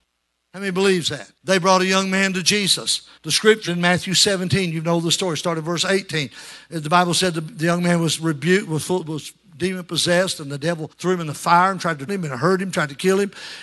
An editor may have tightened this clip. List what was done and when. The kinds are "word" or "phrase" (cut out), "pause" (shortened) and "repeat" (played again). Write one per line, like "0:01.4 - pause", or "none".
0:01.4 - pause
0:03.2 - pause
0:03.7 - word
0:10.9 - pause
0:12.1 - word